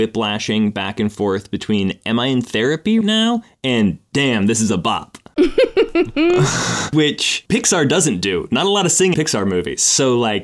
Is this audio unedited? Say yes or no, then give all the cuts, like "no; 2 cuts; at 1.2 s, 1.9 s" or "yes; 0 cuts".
no; 2 cuts; at 3.0 s, 9.1 s